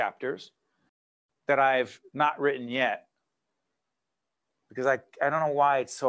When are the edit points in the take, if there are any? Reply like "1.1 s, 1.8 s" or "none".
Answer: none